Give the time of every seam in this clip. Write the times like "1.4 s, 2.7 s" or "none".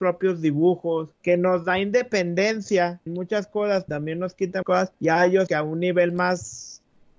1.1 s, 3.1 s, 3.9 s, 4.6 s, 4.9 s, 5.5 s